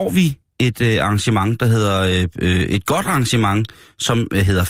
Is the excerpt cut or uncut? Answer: uncut